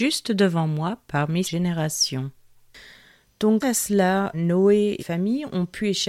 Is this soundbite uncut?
no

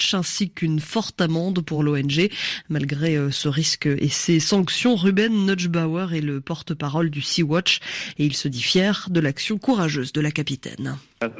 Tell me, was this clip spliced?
no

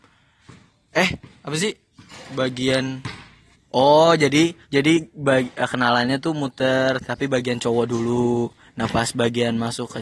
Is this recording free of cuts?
no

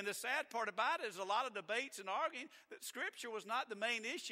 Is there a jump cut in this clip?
no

